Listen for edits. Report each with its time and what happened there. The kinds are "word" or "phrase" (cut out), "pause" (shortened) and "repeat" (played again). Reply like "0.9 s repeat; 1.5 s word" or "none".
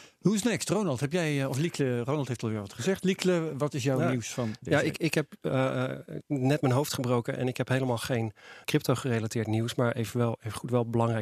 8.6 s word